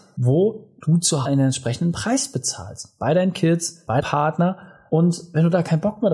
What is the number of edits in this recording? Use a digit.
2